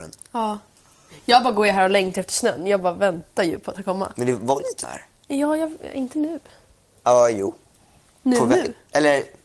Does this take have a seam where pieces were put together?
yes; 2 cuts; at 3.7 s, 4.8 s

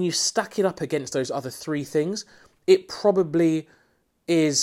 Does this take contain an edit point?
no; 0 cuts

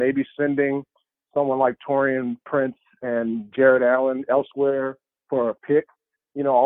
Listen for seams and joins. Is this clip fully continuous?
yes; 0 cuts

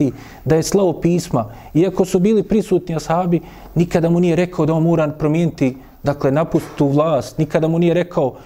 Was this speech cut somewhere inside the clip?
no; 0 cuts

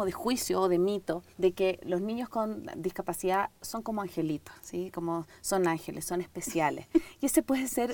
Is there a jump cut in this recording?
yes; 2 cuts; at 1.3 s, 4.6 s

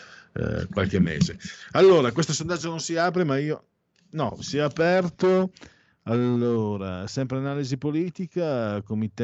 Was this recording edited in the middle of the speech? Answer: no; 0 cuts

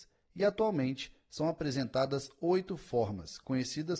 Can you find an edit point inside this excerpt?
no; 0 cuts

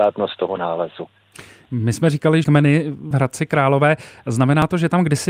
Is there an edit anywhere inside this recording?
yes; 2 cuts; at 2.4 s, 3.1 s

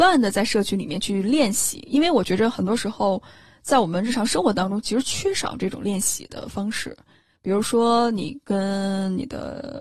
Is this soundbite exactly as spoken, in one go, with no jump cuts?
yes; 0 cuts

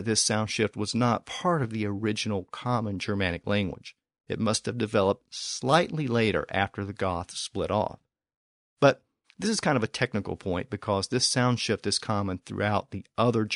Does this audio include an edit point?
no; 0 cuts

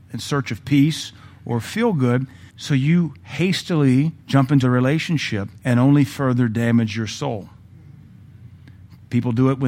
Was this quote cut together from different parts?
yes; 4 cuts; at 2.5 s, 4.2 s, 4.6 s, 5.6 s

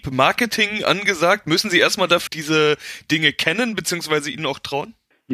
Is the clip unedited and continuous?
no; 1 cut; at 2.3 s

